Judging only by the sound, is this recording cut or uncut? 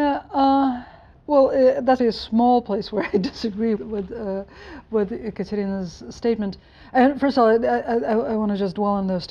cut